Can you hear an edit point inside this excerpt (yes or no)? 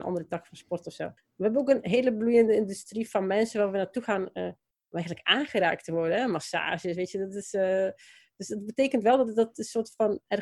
yes